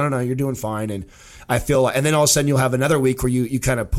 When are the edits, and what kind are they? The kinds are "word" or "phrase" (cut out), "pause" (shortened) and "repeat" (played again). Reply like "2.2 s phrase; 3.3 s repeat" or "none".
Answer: none